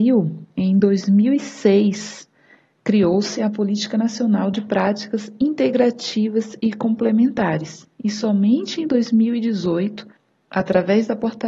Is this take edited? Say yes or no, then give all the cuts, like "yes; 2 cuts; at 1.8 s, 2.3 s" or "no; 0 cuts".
no; 0 cuts